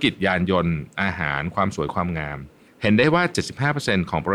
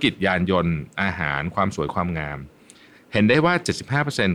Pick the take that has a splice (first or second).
first